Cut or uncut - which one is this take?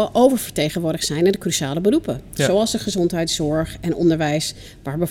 uncut